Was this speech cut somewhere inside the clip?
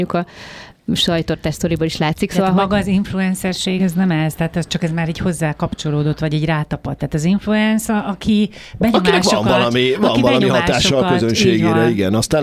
no; 0 cuts

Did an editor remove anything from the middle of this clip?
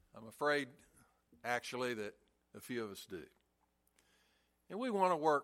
no; 0 cuts

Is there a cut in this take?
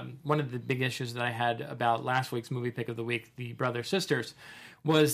no; 0 cuts

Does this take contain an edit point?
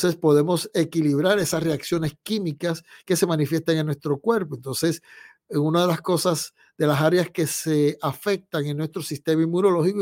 no; 0 cuts

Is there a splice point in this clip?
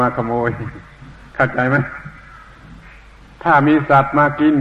yes; 1 cut; at 1.3 s

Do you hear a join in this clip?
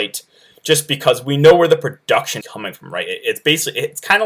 yes; 1 cut; at 2.4 s

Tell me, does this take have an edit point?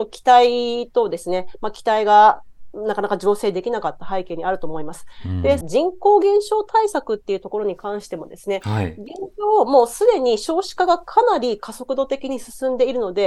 yes; 1 cut; at 5.6 s

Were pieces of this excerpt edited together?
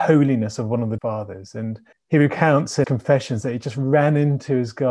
yes; 3 cuts; at 1.0 s, 1.9 s, 2.8 s

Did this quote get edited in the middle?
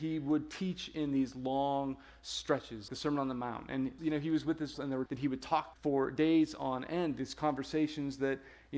yes; 5 cuts; at 2.9 s, 4.0 s, 4.7 s, 5.1 s, 5.7 s

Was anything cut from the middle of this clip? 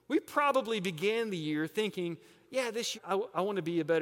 yes; 1 cut; at 2.9 s

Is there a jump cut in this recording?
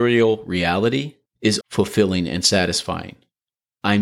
yes; 1 cut; at 1.6 s

